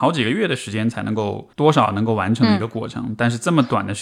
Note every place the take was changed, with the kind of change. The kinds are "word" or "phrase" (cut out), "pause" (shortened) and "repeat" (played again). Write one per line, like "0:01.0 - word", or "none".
0:01.5 - pause